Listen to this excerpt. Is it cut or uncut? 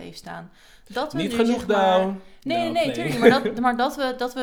uncut